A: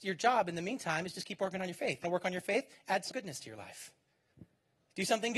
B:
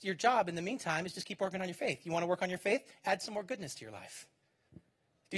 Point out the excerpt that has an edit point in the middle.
A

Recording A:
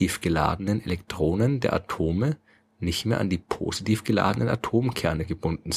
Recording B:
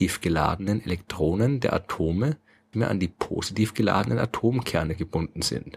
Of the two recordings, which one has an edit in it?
B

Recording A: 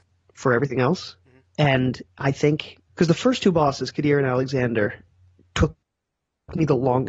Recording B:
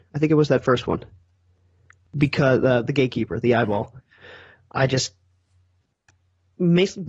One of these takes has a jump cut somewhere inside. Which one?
A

